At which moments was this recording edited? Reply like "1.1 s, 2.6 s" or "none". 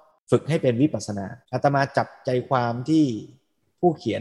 1.4 s